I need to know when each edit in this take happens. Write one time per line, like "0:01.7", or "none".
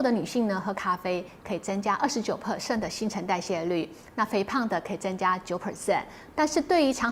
none